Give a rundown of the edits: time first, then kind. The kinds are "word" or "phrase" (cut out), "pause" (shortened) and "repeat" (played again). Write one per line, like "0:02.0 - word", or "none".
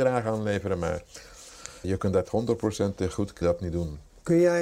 0:01.8 - word
0:02.2 - word
0:03.4 - word